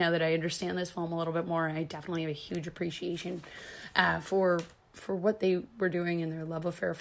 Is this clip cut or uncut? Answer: uncut